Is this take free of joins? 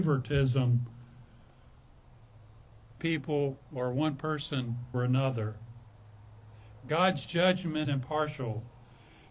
no; 4 cuts; at 3.0 s, 3.6 s, 4.9 s, 7.8 s

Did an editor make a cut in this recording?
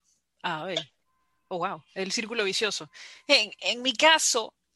yes; 1 cut; at 3.6 s

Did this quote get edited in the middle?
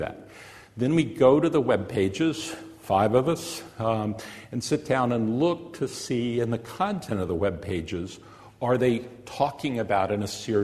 no; 0 cuts

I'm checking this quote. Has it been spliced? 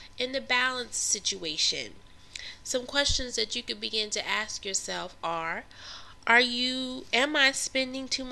no; 0 cuts

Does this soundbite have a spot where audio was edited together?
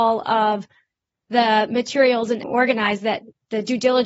yes; 1 cut; at 2.4 s

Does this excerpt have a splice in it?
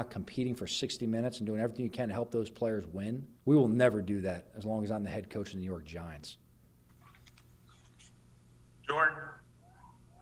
yes; 1 cut; at 3.4 s

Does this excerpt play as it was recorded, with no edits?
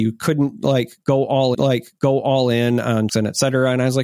no; 2 cuts; at 1.5 s, 3.1 s

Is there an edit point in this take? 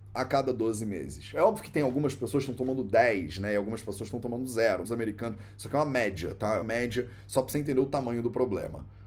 yes; 2 cuts; at 4.8 s, 6.6 s

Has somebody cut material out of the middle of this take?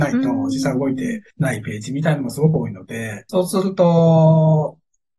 yes; 2 cuts; at 1.3 s, 3.3 s

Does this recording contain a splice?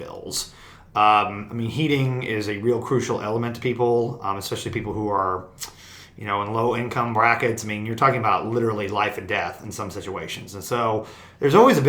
no; 0 cuts

